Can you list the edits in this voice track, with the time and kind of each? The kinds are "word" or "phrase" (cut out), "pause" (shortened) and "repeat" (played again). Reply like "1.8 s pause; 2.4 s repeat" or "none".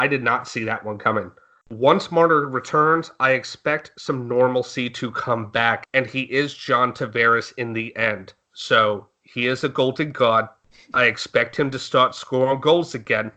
none